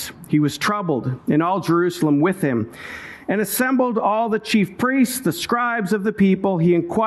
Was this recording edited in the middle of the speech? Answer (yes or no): no